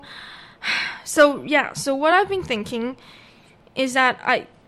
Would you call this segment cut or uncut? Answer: uncut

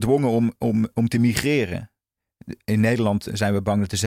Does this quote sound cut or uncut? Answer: uncut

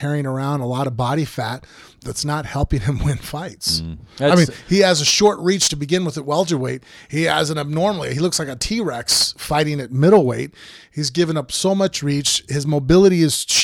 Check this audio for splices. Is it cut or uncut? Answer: uncut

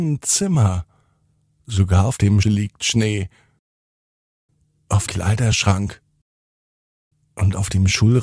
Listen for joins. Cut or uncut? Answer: cut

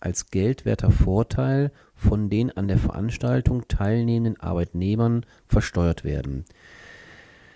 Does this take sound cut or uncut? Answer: uncut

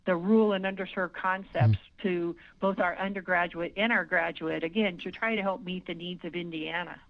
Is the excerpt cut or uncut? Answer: uncut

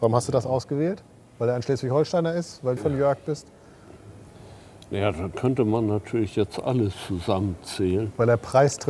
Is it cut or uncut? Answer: cut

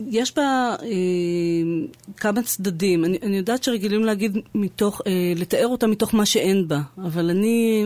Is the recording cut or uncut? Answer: uncut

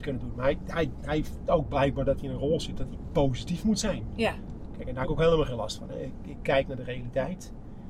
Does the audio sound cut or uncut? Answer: cut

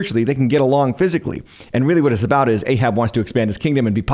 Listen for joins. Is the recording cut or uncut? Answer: uncut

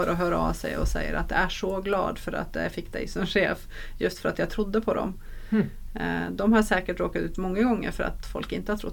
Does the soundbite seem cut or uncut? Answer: uncut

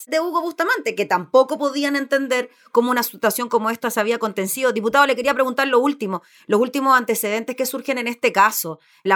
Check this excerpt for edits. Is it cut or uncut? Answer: uncut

